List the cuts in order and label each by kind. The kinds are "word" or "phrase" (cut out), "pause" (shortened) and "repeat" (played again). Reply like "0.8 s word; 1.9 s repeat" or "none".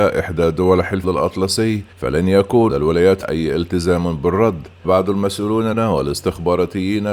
1.0 s word; 1.9 s pause; 2.7 s word; 3.2 s word; 4.8 s word; 5.7 s word